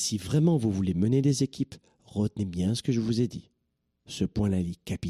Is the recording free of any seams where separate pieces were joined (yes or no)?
yes